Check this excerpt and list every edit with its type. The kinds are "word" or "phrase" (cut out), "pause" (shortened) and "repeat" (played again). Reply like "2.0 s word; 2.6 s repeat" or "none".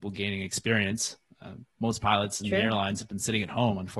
none